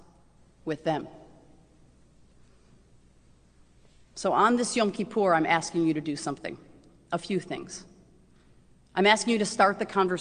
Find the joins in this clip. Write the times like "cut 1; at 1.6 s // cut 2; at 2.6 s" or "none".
none